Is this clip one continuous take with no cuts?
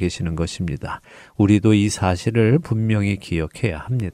yes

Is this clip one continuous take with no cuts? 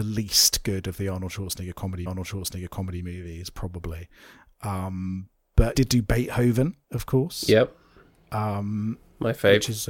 no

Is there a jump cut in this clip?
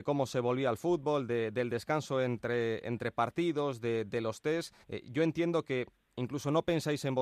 yes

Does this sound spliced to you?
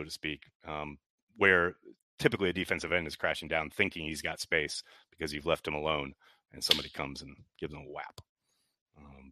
no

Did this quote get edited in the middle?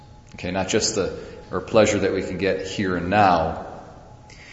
yes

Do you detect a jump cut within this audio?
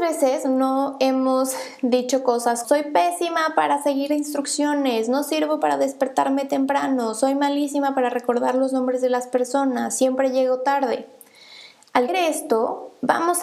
yes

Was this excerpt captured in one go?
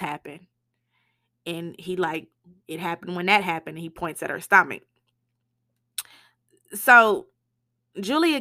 yes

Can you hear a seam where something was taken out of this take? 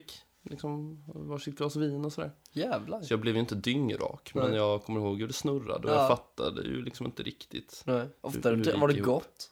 no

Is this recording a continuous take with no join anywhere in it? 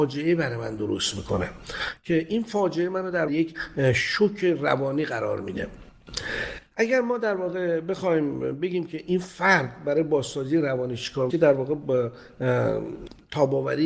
no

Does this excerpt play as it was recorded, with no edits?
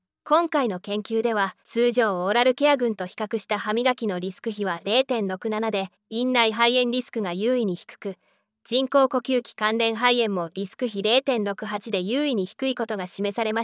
no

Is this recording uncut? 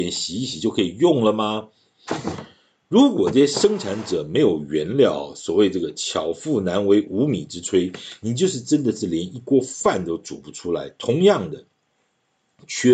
yes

